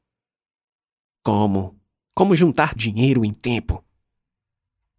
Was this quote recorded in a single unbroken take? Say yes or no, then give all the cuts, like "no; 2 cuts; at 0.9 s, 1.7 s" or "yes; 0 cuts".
no; 2 cuts; at 2.8 s, 3.3 s